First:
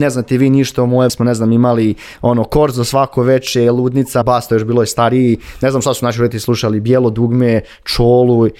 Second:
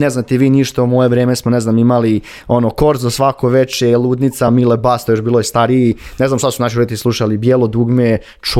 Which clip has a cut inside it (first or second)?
first